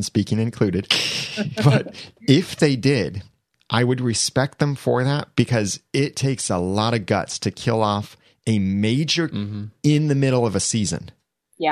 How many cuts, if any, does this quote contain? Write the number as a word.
one